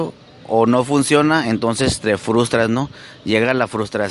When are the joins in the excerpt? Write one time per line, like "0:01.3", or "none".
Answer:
none